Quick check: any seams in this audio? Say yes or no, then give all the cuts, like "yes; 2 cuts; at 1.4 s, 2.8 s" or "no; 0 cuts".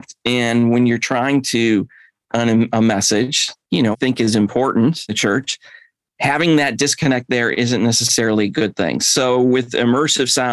yes; 4 cuts; at 2.2 s, 3.6 s, 3.9 s, 5.1 s